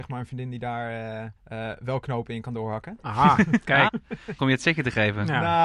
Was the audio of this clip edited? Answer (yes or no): yes